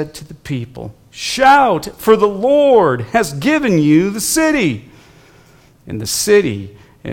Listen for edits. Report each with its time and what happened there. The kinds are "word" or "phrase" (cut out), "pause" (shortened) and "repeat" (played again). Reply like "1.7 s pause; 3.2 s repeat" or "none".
none